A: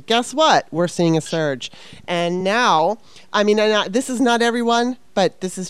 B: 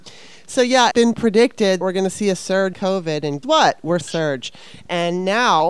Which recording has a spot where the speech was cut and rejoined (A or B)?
B